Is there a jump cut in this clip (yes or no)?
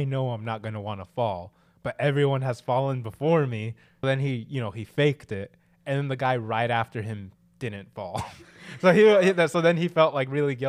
yes